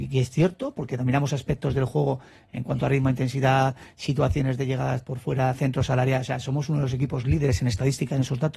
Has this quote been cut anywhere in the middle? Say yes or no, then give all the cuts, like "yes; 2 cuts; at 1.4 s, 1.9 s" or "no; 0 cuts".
no; 0 cuts